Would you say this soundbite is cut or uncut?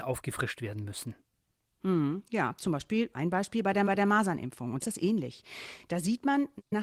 cut